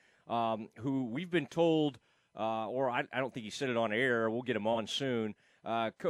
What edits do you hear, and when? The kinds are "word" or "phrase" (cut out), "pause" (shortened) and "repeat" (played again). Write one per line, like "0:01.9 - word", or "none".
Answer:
none